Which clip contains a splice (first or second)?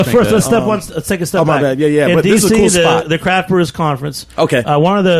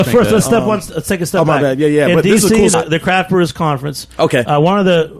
second